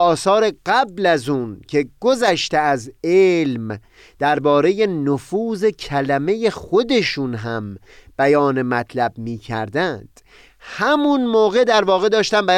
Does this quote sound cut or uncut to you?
uncut